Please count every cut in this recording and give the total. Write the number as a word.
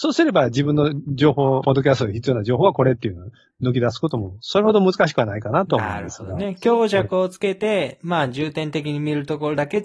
two